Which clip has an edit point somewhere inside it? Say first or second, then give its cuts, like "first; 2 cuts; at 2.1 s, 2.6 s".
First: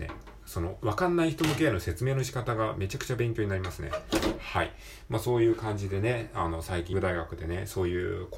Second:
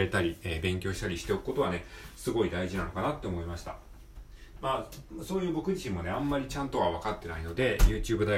first; 1 cut; at 6.9 s